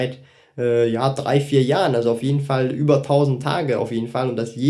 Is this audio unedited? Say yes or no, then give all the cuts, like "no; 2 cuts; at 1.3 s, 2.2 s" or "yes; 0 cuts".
yes; 0 cuts